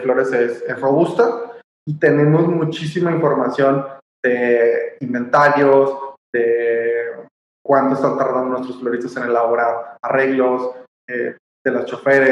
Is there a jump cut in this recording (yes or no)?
no